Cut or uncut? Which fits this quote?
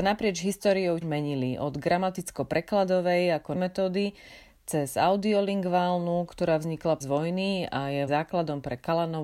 cut